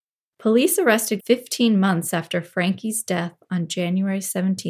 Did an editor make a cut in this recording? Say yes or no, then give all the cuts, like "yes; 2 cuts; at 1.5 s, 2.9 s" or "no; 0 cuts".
yes; 1 cut; at 1.2 s